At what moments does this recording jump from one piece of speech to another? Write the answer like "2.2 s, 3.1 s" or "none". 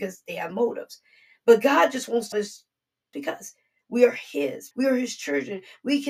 2.3 s, 3.1 s, 4.7 s